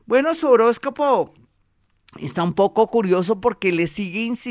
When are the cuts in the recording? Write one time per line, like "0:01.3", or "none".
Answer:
none